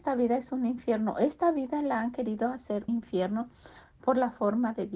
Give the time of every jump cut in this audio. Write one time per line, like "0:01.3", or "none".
0:02.9